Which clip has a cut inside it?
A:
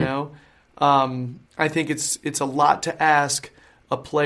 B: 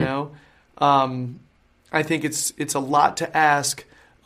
A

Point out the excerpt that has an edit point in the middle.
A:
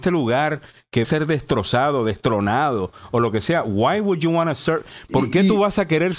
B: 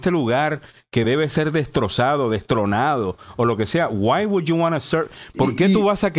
A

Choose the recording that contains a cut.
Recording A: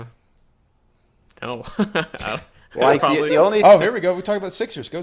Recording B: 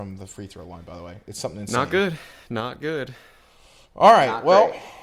A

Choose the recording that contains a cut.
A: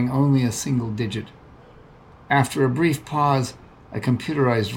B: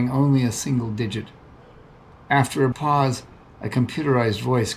B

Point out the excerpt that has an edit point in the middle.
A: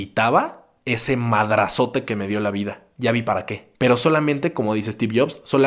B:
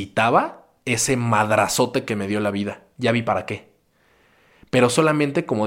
A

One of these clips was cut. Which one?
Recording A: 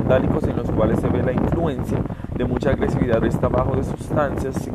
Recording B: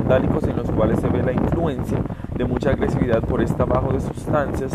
A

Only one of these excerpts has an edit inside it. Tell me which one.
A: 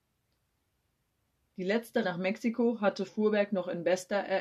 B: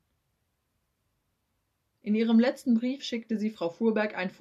A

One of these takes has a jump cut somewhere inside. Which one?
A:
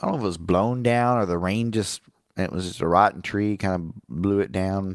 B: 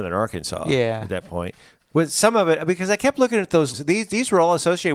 B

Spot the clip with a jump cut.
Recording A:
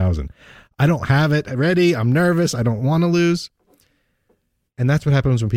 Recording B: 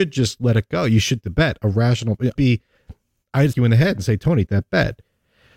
B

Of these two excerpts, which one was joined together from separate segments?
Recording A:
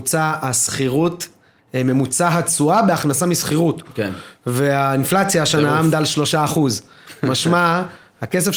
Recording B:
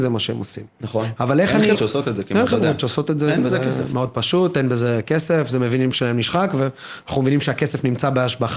B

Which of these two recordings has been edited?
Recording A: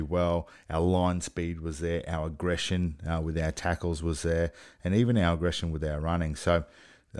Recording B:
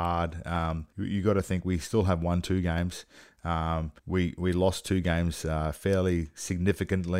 B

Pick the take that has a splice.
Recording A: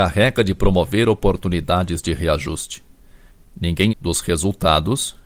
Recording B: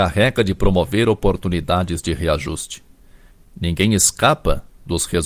A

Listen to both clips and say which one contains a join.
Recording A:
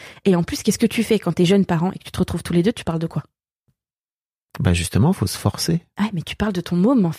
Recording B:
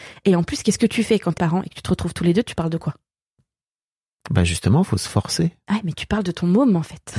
B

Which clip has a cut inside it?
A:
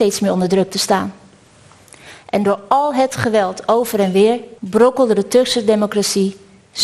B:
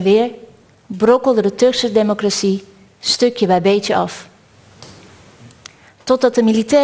A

